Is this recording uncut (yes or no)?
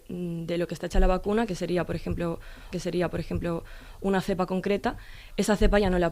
no